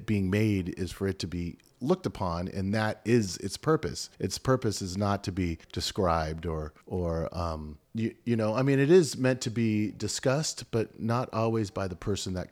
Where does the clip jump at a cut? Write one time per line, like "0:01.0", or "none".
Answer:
0:04.1
0:05.6
0:06.8
0:07.8